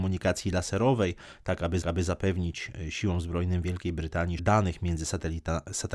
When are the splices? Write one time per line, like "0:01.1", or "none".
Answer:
0:01.8
0:04.4